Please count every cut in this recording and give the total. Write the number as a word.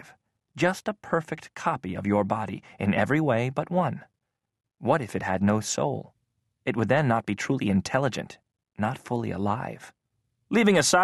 zero